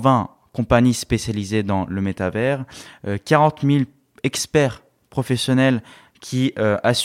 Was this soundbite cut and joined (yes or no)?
no